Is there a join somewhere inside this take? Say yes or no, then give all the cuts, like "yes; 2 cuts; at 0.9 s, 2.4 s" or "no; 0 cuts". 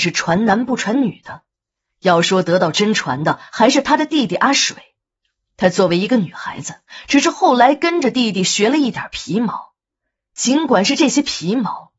no; 0 cuts